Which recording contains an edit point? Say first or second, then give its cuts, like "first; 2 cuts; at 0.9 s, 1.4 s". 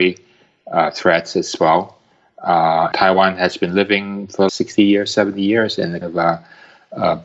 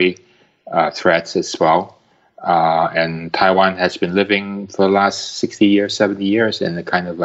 first; 3 cuts; at 2.9 s, 4.5 s, 6.0 s